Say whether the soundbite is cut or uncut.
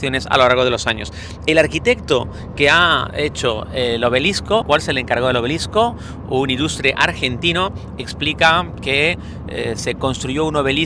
cut